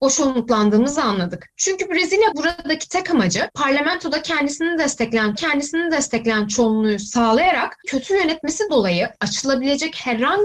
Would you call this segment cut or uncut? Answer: cut